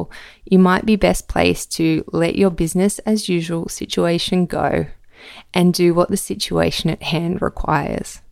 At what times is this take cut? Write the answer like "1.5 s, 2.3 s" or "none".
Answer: none